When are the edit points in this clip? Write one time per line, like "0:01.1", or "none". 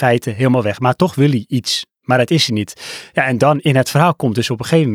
none